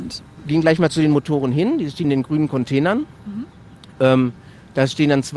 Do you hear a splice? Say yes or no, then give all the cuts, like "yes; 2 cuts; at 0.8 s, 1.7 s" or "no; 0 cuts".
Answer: yes; 1 cut; at 2.0 s